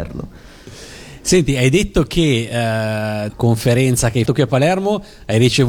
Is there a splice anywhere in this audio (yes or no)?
yes